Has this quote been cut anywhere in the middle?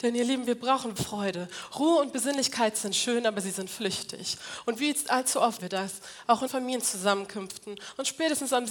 yes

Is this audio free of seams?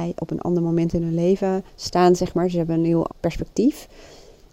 no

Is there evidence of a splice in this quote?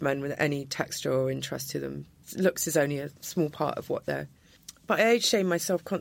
yes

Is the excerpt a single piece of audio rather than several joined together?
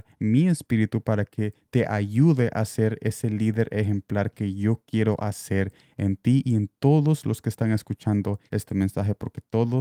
no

